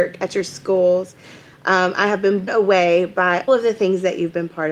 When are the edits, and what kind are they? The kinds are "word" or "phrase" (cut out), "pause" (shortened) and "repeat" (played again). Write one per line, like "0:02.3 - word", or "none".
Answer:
0:02.5 - word
0:03.5 - word